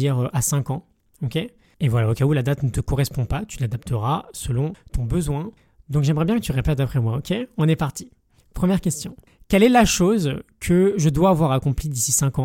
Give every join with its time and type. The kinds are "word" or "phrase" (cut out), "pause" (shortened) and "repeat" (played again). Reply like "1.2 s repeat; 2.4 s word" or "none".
none